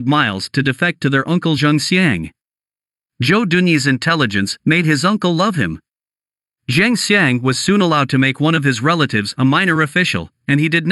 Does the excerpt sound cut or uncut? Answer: uncut